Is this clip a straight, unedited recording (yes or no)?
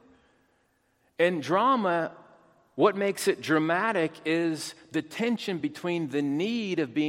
yes